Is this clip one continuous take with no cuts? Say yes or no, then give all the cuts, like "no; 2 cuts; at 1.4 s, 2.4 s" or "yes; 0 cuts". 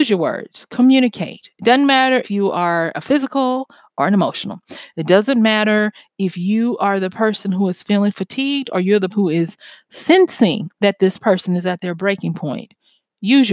no; 2 cuts; at 2.2 s, 9.1 s